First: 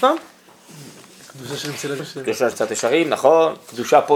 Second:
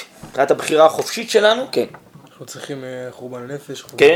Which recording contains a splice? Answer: first; 2 cuts; at 2.0 s, 2.5 s

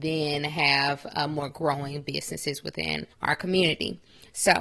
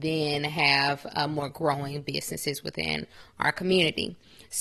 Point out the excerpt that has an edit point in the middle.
first; 1 cut; at 3.1 s

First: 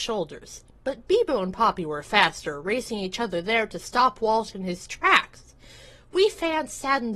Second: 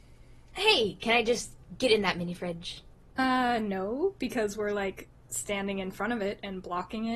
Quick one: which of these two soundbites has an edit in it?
second; 1 cut; at 2.9 s

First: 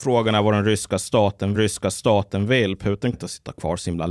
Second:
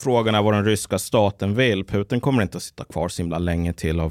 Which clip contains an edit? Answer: first; 2 cuts; at 1.5 s, 3.1 s

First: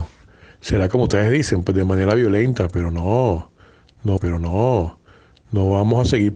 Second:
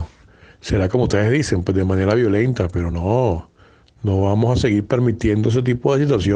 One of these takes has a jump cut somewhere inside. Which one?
first; 1 cut; at 4.2 s

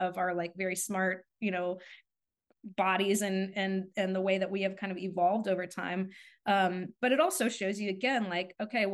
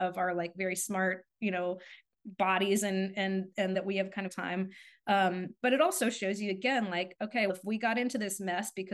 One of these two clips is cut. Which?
second; 4 cuts; at 2.1 s, 3.7 s, 4.3 s, 7.5 s

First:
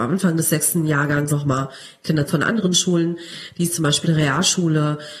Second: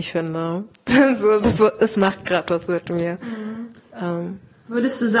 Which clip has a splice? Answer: first; 3 cuts; at 1.3 s, 2.3 s, 4.0 s

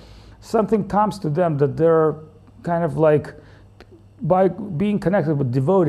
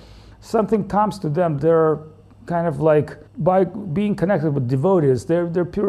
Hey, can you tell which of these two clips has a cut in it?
second; 2 cuts; at 1.6 s, 3.3 s

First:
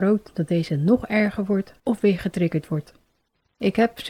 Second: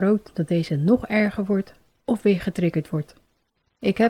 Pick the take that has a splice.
first; 1 cut; at 1.8 s

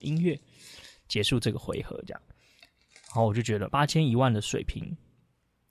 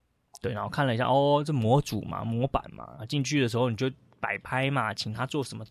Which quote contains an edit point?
first; 1 cut; at 3.7 s

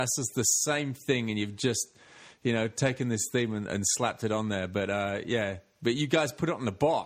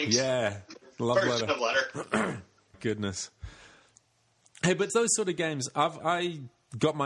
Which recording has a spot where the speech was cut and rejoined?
second; 4 cuts; at 1.6 s, 2.7 s, 4.9 s, 6.0 s

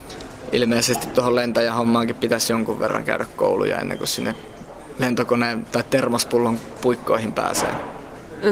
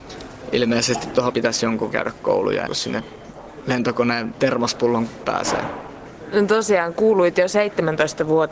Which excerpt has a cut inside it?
second; 5 cuts; at 1.3 s, 1.9 s, 2.7 s, 4.3 s, 5.2 s

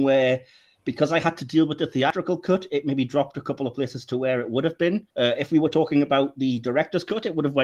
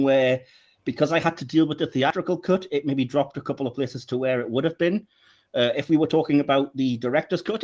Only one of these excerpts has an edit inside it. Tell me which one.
first; 1 cut; at 5.1 s

